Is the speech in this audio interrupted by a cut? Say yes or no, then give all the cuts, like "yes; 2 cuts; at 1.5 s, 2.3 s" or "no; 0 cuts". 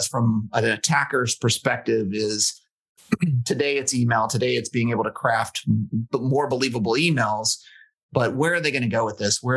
no; 0 cuts